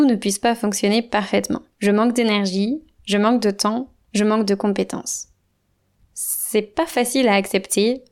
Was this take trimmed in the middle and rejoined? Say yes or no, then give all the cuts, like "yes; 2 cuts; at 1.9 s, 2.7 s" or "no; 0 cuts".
yes; 1 cut; at 1.7 s